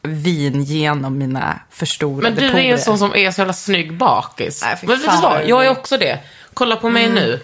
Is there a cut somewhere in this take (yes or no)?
no